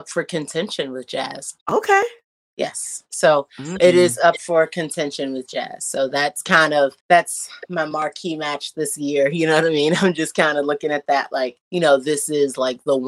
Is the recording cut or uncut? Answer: cut